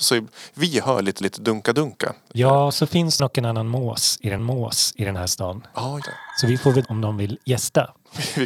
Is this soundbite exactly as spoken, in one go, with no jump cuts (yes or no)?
no